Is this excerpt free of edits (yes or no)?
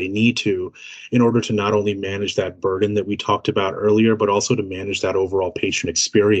yes